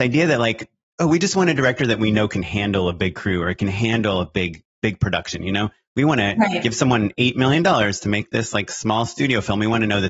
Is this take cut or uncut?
uncut